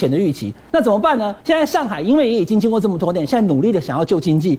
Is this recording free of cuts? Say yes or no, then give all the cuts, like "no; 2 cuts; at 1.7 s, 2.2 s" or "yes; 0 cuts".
no; 1 cut; at 1.4 s